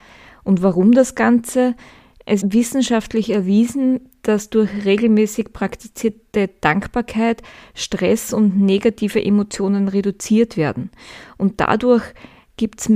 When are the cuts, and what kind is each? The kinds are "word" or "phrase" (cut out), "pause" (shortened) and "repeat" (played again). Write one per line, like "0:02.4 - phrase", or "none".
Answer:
0:02.4 - word